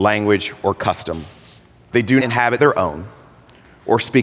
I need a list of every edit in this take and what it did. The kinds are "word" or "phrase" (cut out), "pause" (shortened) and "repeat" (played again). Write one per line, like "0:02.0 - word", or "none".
0:01.6 - pause
0:02.2 - word
0:02.6 - phrase